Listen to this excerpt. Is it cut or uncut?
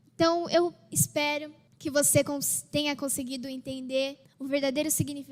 uncut